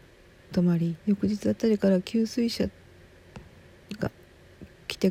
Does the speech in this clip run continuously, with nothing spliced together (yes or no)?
no